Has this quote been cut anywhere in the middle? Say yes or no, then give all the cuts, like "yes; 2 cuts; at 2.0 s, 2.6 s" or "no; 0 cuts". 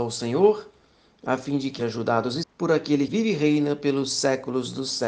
yes; 3 cuts; at 1.8 s, 2.4 s, 3.1 s